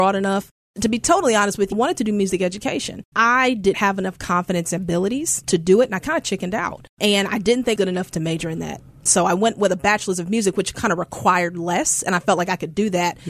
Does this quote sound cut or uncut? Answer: cut